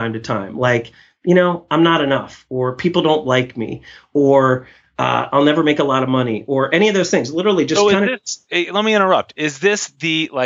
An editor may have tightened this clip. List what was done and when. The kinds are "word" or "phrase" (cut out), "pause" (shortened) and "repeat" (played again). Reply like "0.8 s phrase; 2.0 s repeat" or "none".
none